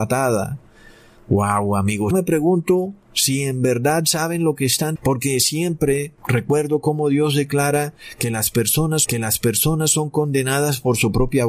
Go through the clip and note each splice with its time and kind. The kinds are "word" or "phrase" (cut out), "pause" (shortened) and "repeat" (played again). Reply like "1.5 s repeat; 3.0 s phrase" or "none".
2.1 s word; 5.0 s word; 6.2 s pause; 9.0 s repeat